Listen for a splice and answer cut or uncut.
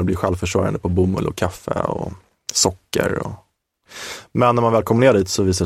uncut